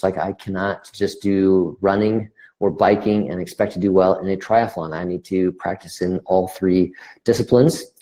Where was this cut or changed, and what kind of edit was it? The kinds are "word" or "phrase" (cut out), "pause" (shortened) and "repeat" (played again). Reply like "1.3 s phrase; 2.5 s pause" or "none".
none